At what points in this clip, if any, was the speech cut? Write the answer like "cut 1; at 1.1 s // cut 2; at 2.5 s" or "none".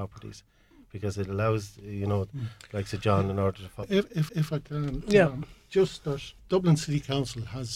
cut 1; at 3.8 s // cut 2; at 4.3 s // cut 3; at 6.4 s